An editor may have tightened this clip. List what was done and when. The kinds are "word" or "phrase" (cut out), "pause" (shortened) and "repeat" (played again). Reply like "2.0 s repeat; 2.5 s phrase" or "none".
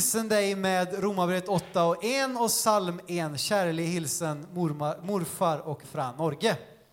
5.8 s word